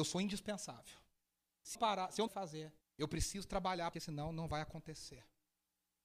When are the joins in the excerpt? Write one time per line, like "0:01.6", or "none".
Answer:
0:01.7
0:02.3
0:02.8
0:03.9